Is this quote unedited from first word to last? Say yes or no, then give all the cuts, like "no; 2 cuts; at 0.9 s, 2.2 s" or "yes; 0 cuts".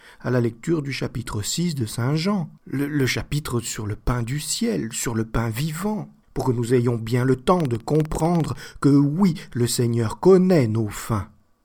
no; 2 cuts; at 2.6 s, 6.2 s